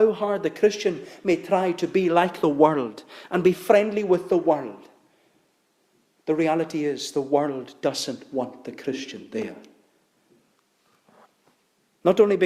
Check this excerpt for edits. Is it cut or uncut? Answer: uncut